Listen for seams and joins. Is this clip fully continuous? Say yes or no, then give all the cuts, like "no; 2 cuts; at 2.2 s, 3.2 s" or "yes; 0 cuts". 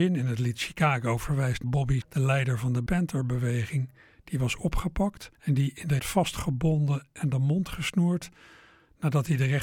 no; 5 cuts; at 1.6 s, 2.0 s, 2.9 s, 5.3 s, 6.0 s